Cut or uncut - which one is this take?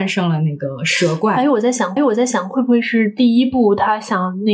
cut